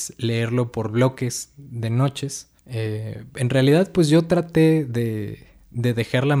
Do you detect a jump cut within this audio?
yes; 1 cut; at 2.6 s

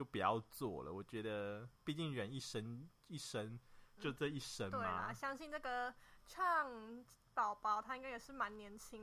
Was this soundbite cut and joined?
yes; 2 cuts; at 1.7 s, 4.0 s

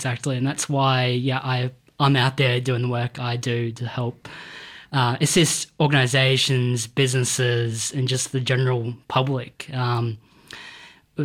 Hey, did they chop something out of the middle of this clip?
no; 0 cuts

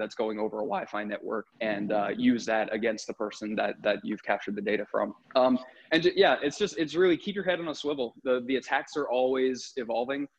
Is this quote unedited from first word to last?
no; 2 cuts; at 1.5 s, 5.2 s

